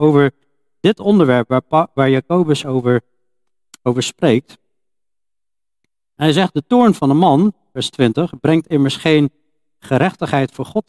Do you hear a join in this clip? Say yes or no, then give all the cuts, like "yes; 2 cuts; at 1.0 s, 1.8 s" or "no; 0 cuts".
no; 0 cuts